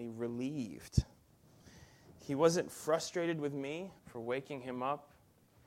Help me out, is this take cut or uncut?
cut